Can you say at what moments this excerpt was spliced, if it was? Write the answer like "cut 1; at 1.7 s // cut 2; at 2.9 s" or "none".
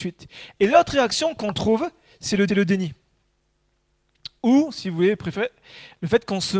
cut 1; at 2.5 s